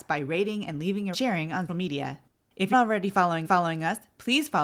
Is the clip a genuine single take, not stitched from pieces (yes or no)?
no